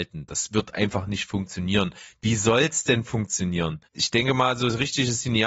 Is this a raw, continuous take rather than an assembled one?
no; 1 cut; at 3.9 s

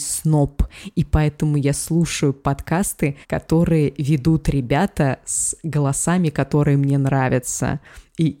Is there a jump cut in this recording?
yes; 1 cut; at 3.2 s

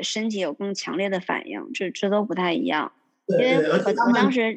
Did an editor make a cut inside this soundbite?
no; 0 cuts

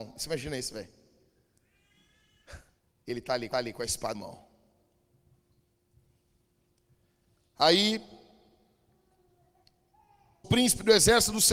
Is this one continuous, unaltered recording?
no; 4 cuts; at 2.8 s, 3.5 s, 4.1 s, 10.4 s

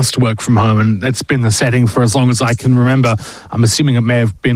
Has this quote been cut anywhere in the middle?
no; 0 cuts

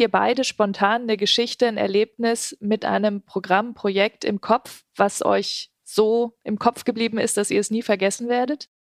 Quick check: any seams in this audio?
yes; 1 cut; at 5.8 s

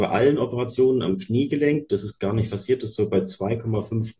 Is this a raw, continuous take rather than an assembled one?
no; 1 cut; at 2.5 s

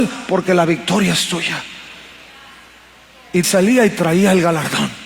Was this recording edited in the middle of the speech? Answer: yes; 1 cut; at 3.4 s

